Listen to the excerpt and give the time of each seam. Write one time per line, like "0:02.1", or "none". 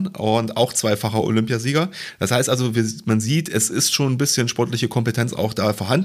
none